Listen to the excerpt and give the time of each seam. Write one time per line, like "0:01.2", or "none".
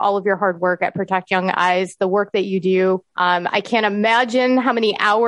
0:03.1